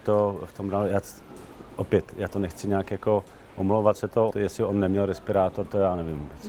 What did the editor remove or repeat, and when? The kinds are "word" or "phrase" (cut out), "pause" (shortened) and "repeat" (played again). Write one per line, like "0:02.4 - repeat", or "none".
0:04.0 - word
0:04.3 - word